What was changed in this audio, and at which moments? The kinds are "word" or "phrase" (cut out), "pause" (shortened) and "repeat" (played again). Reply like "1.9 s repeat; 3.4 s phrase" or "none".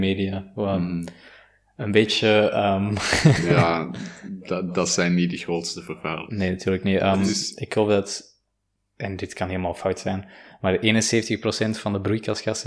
none